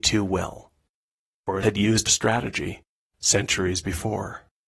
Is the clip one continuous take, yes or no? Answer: no